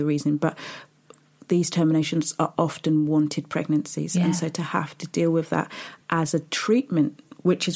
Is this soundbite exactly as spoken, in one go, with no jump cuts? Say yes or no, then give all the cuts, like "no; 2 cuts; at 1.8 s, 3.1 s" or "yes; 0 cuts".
yes; 0 cuts